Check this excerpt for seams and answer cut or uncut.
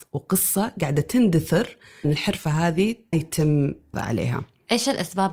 cut